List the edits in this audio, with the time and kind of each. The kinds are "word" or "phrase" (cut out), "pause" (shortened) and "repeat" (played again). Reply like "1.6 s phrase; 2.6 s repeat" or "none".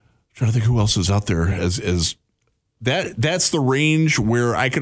none